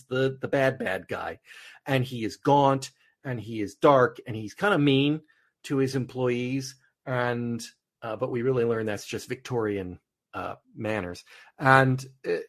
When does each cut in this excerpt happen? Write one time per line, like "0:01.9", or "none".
0:10.6